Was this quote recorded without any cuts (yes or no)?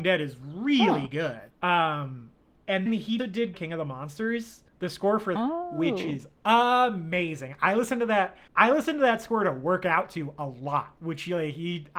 no